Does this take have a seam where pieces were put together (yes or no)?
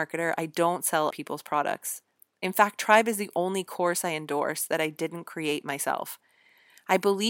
yes